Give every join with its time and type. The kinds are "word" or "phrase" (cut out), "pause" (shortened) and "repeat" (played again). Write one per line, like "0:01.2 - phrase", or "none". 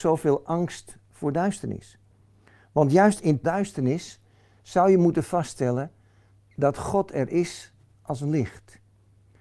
0:03.4 - phrase